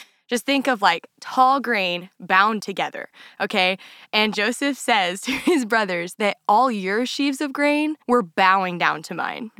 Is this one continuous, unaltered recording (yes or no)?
no